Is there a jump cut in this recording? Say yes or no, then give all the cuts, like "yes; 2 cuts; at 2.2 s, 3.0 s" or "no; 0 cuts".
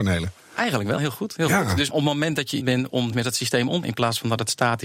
yes; 5 cuts; at 1.0 s, 1.9 s, 2.6 s, 3.1 s, 3.8 s